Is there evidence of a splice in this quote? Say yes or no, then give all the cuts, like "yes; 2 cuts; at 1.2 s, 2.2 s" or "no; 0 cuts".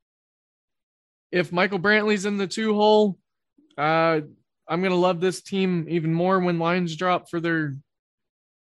no; 0 cuts